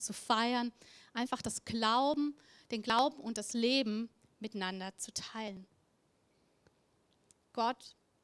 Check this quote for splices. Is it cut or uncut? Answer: uncut